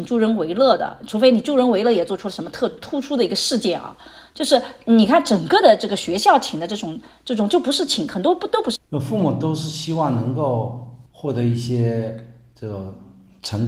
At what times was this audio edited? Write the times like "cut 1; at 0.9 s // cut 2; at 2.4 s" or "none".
cut 1; at 11.1 s